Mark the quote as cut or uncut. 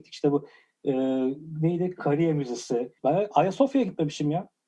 cut